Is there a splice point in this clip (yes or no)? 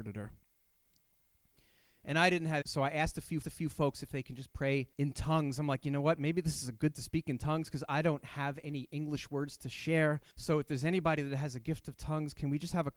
yes